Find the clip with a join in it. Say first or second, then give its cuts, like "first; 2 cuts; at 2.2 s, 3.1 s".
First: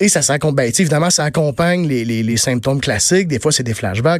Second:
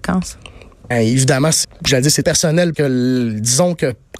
second; 4 cuts; at 0.9 s, 1.6 s, 2.2 s, 2.7 s